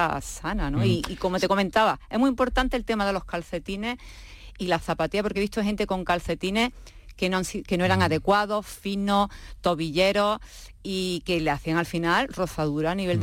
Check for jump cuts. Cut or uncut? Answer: uncut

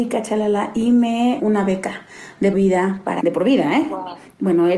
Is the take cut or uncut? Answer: cut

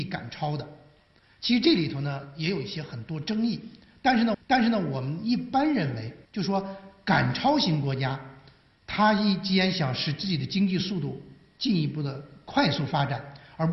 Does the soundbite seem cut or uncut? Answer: cut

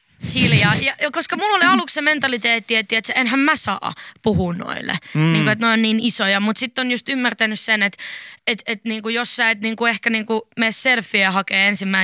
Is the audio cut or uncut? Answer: cut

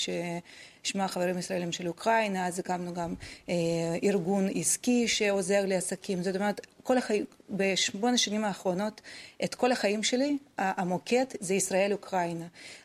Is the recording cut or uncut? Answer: uncut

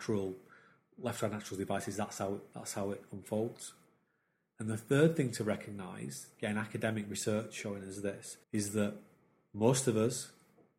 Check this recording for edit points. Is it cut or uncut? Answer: cut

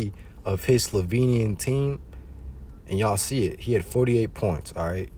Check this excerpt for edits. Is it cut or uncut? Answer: uncut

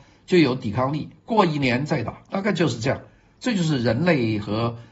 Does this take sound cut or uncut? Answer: uncut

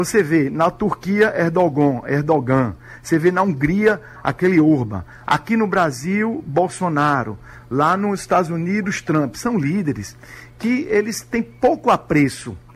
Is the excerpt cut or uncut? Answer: uncut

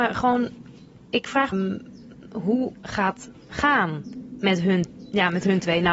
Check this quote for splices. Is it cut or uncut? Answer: cut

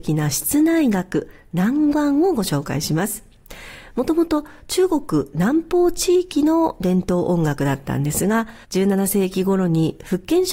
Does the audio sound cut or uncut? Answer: cut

